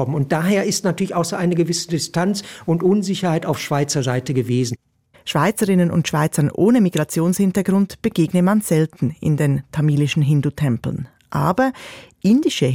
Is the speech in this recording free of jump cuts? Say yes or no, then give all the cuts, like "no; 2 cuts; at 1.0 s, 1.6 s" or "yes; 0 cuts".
yes; 0 cuts